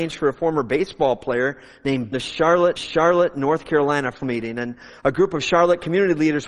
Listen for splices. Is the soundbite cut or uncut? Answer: cut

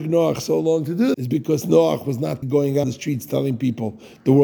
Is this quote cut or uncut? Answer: cut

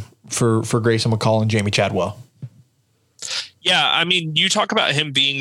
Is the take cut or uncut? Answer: uncut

